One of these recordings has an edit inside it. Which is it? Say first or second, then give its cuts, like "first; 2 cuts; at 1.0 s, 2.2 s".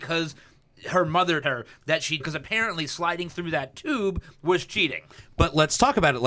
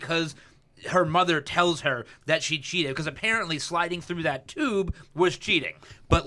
first; 2 cuts; at 1.4 s, 2.2 s